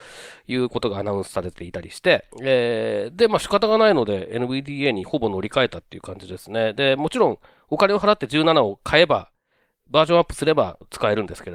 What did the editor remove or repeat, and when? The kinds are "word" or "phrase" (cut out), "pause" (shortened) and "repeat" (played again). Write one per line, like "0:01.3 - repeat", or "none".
0:02.3 - pause